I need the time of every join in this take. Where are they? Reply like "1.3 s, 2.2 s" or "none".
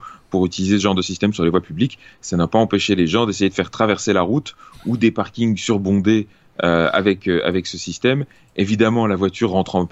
none

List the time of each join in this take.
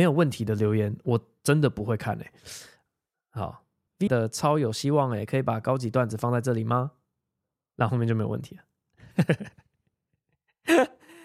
4.1 s

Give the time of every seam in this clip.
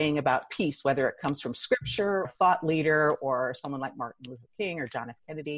2.2 s

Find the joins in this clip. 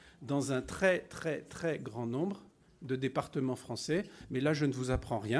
none

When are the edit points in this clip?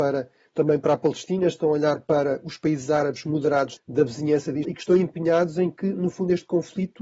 3.8 s, 4.6 s

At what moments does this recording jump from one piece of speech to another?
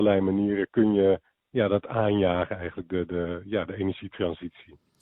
none

